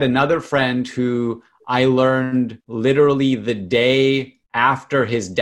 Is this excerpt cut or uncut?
cut